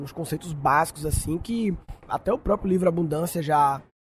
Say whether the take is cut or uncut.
uncut